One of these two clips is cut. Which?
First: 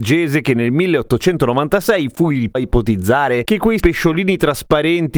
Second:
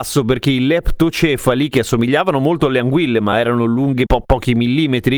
first; 2 cuts; at 2.5 s, 3.8 s

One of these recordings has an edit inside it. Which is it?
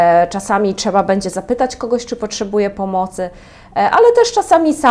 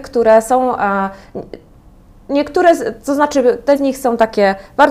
second; 1 cut; at 3.8 s

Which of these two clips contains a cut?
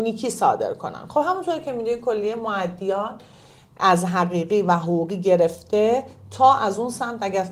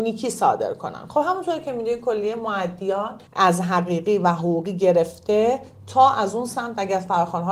second; 1 cut; at 3.3 s

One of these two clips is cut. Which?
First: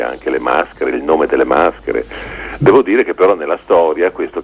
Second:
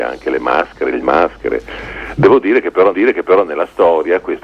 second; 2 cuts; at 1.0 s, 2.9 s

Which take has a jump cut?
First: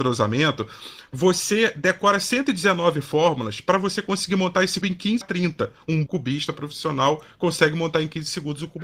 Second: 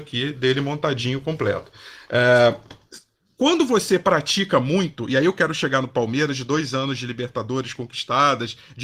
first; 3 cuts; at 4.8 s, 5.2 s, 6.1 s

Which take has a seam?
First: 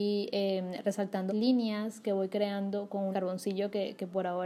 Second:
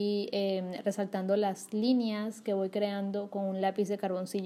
first; 2 cuts; at 1.3 s, 3.1 s

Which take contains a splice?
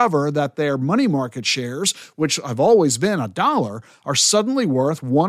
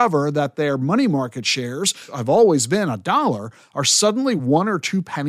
second; 2 cuts; at 2.1 s, 4.4 s

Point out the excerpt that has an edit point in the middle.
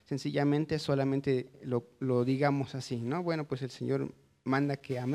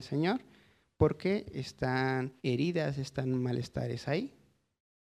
second; 1 cut; at 2.4 s

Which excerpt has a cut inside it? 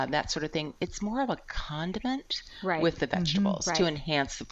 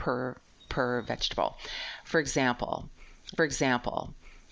second; 1 cut; at 3.4 s

